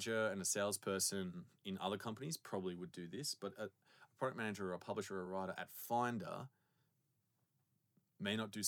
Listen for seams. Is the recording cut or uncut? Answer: uncut